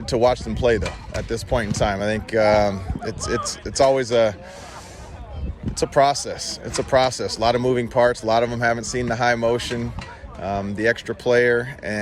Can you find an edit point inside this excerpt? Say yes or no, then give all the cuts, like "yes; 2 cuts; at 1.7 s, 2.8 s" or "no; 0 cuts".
no; 0 cuts